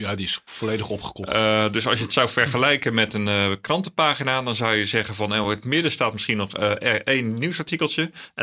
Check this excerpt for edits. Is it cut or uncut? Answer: uncut